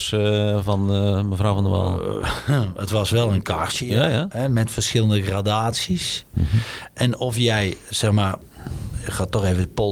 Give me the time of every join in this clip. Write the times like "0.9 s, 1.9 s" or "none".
none